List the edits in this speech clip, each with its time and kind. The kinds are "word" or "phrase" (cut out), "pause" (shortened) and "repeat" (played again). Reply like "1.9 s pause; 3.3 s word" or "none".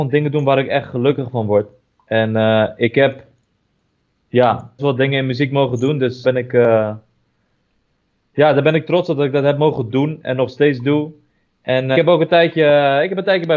4.8 s word; 6.2 s word; 11.9 s word